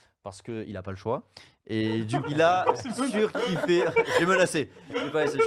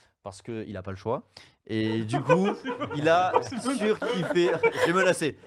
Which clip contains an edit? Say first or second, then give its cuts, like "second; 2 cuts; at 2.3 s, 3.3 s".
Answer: first; 1 cut; at 2.2 s